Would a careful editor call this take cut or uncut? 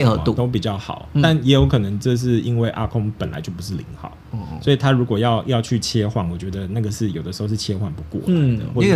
uncut